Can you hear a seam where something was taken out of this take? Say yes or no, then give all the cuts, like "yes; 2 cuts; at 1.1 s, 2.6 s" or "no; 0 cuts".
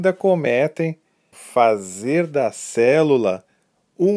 yes; 1 cut; at 1.3 s